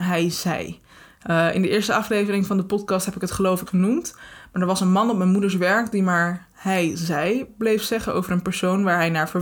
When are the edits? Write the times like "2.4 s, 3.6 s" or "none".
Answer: 3.7 s